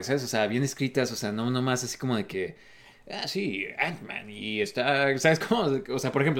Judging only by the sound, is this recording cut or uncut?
uncut